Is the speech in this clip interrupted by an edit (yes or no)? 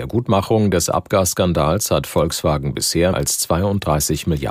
yes